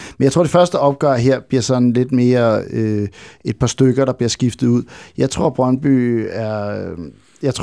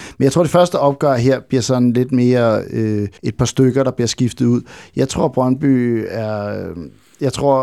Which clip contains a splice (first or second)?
second